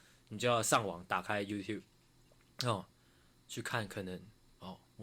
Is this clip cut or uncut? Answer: uncut